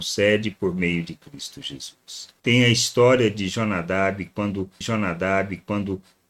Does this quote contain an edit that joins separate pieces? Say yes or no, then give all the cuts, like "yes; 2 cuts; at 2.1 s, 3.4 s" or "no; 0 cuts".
yes; 2 cuts; at 2.4 s, 4.8 s